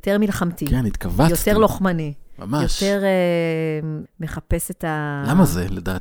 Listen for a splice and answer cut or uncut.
cut